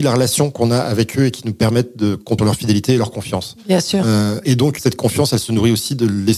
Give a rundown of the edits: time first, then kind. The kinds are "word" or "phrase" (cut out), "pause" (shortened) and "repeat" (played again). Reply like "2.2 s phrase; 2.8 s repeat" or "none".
2.4 s word; 4.4 s word; 4.8 s word